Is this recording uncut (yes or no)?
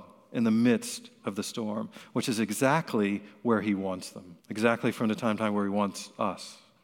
no